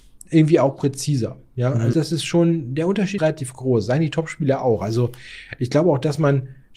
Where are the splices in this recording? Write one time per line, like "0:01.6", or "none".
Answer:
0:01.9
0:03.2